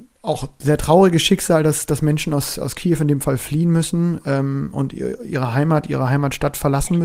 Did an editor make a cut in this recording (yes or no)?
no